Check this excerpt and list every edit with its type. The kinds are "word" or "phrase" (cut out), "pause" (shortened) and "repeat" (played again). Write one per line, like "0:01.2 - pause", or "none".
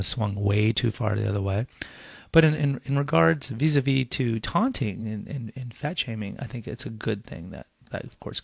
none